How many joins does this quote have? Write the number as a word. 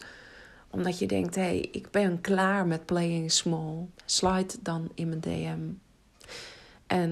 one